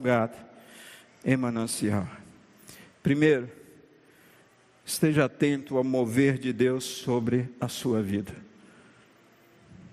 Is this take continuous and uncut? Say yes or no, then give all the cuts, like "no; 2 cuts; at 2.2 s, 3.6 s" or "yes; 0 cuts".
yes; 0 cuts